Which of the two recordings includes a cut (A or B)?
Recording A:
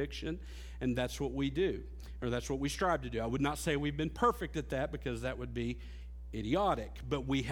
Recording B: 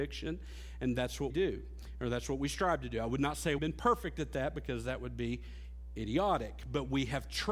B